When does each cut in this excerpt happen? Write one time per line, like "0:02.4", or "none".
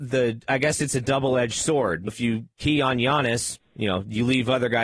0:02.1
0:03.6